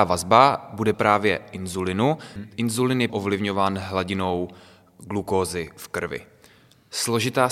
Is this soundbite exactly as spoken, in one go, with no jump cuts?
no; 3 cuts; at 0.9 s, 2.4 s, 3.1 s

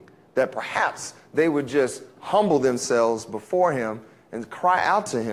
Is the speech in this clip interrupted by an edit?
no; 0 cuts

